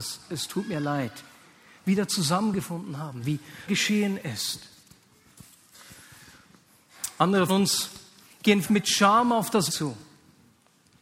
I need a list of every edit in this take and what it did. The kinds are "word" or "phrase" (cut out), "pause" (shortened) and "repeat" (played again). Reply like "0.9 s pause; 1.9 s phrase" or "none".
3.7 s word; 7.5 s word; 8.6 s word; 9.7 s word